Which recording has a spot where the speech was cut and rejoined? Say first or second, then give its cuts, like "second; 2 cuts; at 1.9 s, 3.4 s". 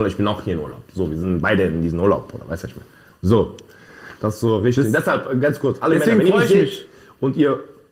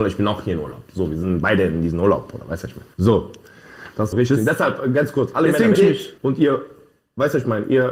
second; 4 cuts; at 2.9 s, 4.1 s, 5.7 s, 6.2 s